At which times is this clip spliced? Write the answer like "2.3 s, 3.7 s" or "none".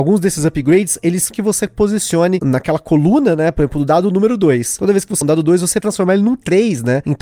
1.3 s, 5.2 s, 5.8 s